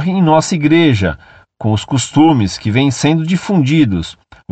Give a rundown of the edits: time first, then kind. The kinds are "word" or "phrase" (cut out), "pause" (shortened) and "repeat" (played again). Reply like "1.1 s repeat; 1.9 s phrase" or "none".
none